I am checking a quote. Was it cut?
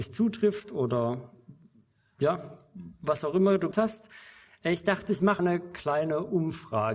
yes; 2 cuts; at 3.7 s, 5.4 s

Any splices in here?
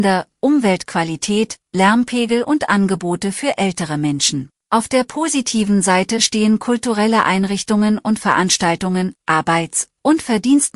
yes; 1 cut; at 4.6 s

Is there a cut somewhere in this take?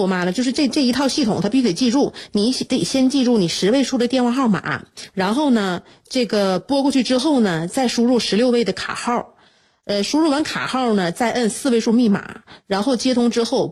no; 0 cuts

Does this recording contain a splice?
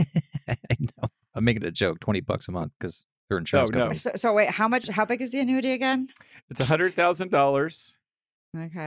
no; 0 cuts

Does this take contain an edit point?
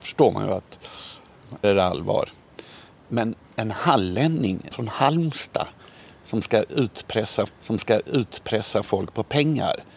yes; 4 cuts; at 1.6 s, 3.4 s, 4.7 s, 7.5 s

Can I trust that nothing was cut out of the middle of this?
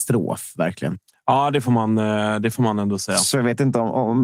yes; 0 cuts

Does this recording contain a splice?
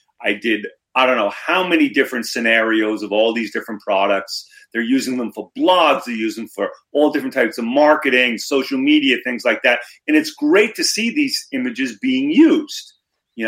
no; 0 cuts

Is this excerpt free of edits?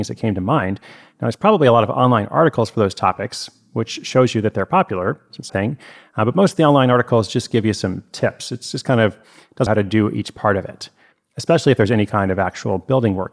no; 2 cuts; at 5.5 s, 9.7 s

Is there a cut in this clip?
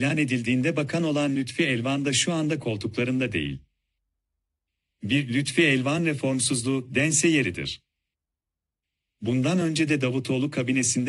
no; 0 cuts

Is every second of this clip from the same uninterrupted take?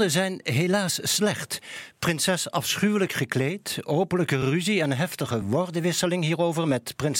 yes; 0 cuts

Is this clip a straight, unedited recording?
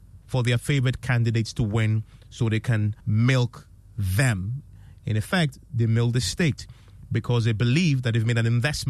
no; 1 cut; at 3.0 s

